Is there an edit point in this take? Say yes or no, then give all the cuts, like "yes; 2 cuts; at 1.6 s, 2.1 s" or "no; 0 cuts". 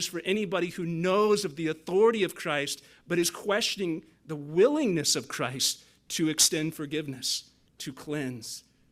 yes; 1 cut; at 7.7 s